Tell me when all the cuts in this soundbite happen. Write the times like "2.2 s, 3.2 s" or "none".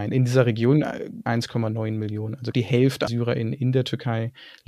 1.3 s, 2.5 s, 3.1 s